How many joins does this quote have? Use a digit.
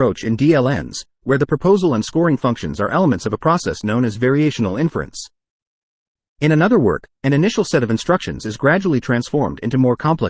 0